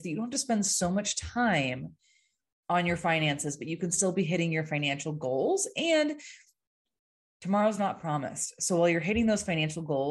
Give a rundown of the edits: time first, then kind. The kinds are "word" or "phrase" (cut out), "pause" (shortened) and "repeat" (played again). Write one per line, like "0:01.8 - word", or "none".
none